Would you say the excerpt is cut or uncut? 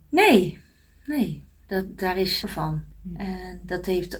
cut